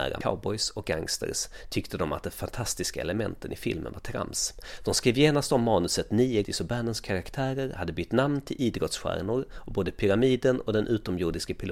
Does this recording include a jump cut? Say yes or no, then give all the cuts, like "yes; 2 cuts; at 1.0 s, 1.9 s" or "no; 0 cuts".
yes; 1 cut; at 6.4 s